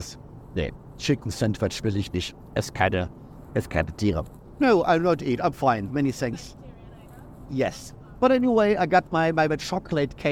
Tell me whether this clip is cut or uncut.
uncut